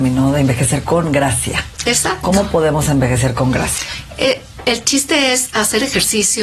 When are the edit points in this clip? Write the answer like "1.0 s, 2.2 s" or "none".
none